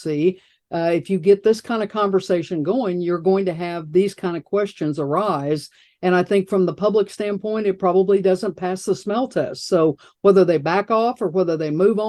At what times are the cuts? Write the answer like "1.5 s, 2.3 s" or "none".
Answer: none